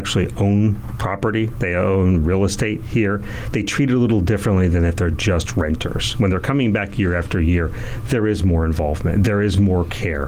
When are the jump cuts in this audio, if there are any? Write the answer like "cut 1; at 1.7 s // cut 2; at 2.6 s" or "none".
none